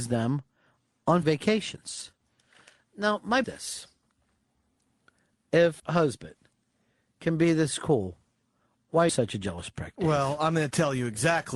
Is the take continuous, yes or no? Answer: no